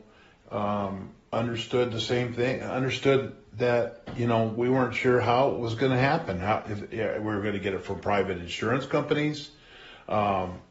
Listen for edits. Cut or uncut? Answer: uncut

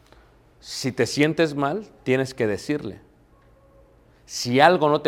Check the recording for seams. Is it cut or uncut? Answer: uncut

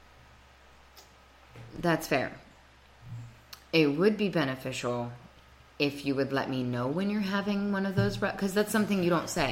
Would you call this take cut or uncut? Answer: uncut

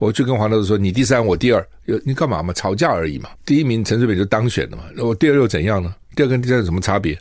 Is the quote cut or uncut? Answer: cut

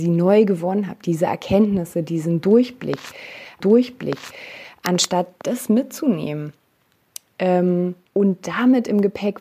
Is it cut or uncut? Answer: cut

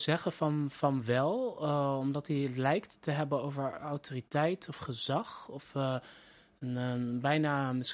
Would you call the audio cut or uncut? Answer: uncut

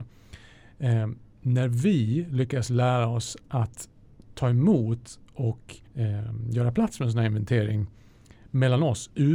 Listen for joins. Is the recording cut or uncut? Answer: cut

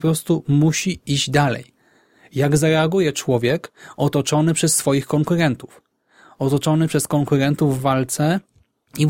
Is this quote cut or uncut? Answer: uncut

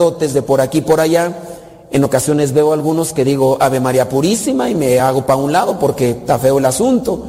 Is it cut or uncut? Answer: uncut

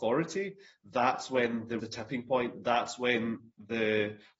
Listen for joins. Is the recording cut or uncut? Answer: cut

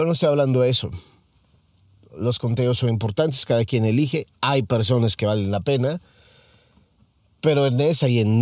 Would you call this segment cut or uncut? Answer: uncut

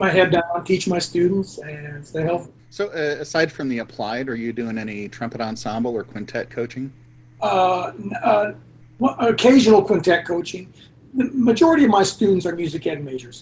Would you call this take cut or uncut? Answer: cut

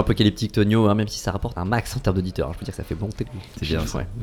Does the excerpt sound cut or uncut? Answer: cut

